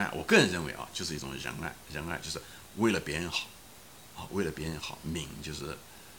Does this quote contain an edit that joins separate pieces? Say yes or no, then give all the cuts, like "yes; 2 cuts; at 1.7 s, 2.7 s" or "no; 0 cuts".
no; 0 cuts